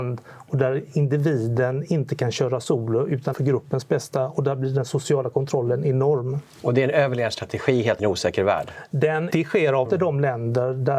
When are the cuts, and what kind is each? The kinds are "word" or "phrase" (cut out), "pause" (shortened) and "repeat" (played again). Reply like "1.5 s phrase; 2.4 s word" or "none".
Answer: 3.3 s word; 6.5 s pause; 8.0 s word; 9.3 s word; 9.8 s word